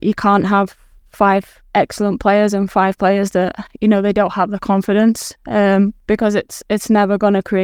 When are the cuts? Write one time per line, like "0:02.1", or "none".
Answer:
0:06.0